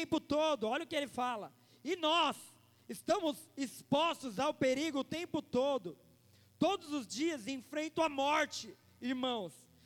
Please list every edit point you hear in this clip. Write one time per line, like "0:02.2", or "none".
none